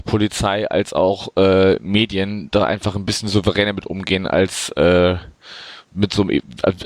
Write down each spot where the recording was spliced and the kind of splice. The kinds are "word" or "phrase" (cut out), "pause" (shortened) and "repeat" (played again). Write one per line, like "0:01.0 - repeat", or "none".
0:05.8 - pause